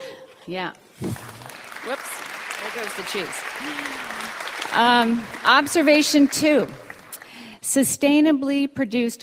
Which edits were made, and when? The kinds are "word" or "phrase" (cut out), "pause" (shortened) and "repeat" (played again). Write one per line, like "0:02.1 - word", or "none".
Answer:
none